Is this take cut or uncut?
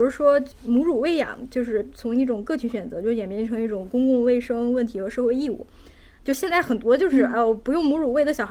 uncut